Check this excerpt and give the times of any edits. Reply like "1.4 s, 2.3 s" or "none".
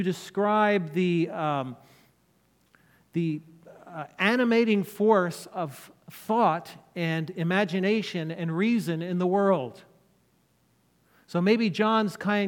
none